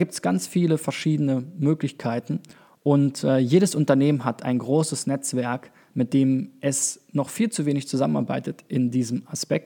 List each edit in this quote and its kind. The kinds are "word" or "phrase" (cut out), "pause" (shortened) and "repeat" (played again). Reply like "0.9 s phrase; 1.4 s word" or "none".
none